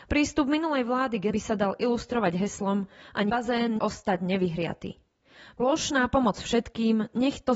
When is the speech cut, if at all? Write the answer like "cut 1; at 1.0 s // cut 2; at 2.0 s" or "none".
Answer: cut 1; at 1.3 s // cut 2; at 3.3 s // cut 3; at 3.8 s